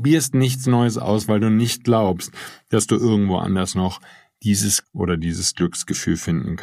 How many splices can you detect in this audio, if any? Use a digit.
1